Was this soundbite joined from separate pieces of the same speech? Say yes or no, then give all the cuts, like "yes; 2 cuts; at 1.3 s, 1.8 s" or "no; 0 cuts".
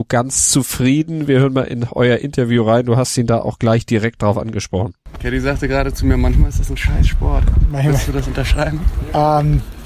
no; 0 cuts